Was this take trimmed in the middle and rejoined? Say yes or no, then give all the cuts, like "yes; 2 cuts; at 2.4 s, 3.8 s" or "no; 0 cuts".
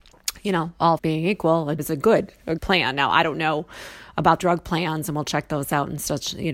yes; 4 cuts; at 1.0 s, 1.8 s, 2.6 s, 4.4 s